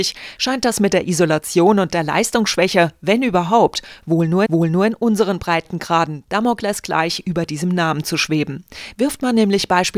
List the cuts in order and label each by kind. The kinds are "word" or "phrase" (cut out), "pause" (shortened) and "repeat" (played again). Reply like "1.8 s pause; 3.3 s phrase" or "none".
4.5 s repeat

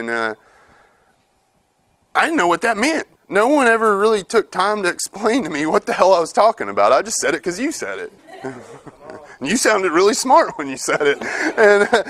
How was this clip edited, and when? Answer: 3.2 s pause; 8.2 s pause

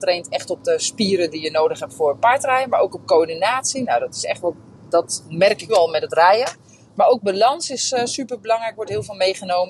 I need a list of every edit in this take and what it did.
5.7 s word

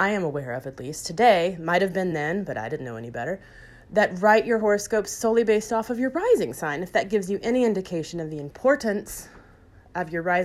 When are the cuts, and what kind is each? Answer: none

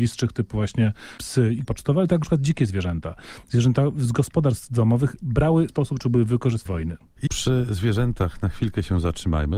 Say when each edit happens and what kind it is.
1.2 s word; 1.6 s word; 2.2 s word; 5.7 s phrase; 6.7 s phrase; 7.3 s word

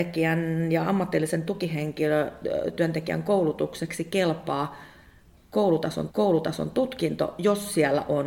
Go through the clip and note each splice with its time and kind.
6.1 s repeat

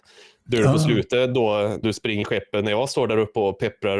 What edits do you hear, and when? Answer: 1.8 s word; 2.2 s word

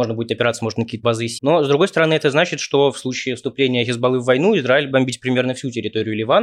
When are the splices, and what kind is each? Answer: 1.0 s word; 1.4 s word; 4.9 s word

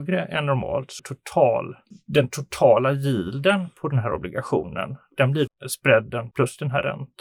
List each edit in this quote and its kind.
1.0 s word; 5.5 s word; 6.3 s word

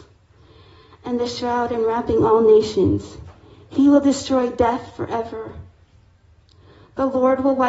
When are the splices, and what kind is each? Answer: none

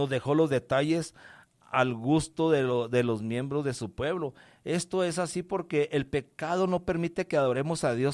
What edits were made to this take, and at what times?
none

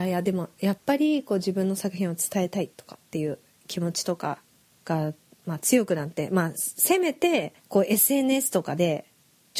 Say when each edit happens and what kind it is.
2.7 s pause; 4.5 s pause; 7.6 s pause

